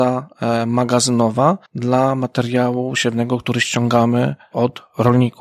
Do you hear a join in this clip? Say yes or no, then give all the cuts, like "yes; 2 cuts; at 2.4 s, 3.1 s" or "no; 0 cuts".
yes; 1 cut; at 1.7 s